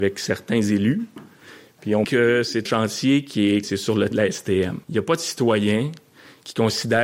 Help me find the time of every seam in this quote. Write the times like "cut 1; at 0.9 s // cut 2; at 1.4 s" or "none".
cut 1; at 2.0 s // cut 2; at 2.7 s // cut 3; at 3.6 s // cut 4; at 4.1 s // cut 5; at 4.8 s